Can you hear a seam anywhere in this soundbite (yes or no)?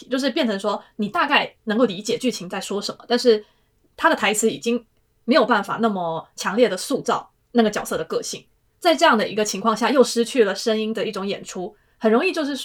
yes